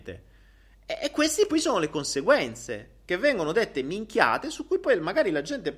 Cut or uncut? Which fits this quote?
uncut